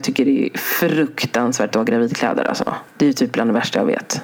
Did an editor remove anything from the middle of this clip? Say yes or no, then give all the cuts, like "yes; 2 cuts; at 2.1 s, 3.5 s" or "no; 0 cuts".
yes; 2 cuts; at 1.7 s, 2.9 s